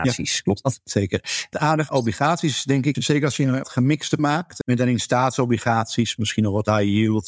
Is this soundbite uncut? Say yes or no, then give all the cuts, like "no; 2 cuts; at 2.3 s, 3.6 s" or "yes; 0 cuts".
no; 7 cuts; at 1.5 s, 1.9 s, 2.9 s, 3.6 s, 4.2 s, 4.6 s, 6.2 s